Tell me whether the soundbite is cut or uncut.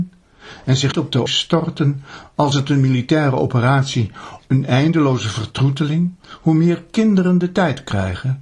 cut